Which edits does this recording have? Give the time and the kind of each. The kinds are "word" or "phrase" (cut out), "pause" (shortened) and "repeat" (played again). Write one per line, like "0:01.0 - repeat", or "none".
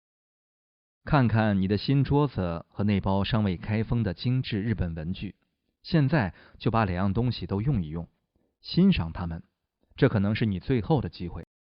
none